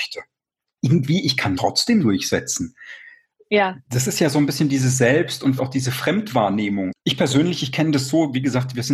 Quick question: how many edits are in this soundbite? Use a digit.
3